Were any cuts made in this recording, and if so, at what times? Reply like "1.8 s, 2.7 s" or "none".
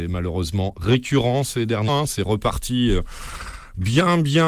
1.9 s